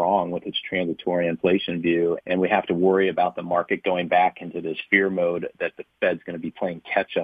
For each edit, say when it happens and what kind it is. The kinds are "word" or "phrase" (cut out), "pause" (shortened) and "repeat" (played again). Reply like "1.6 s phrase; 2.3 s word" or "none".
2.2 s word